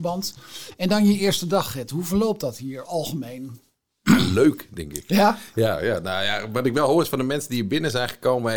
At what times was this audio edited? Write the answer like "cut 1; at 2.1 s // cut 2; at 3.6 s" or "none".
cut 1; at 2.8 s